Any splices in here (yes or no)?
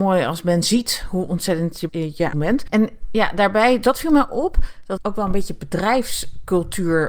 yes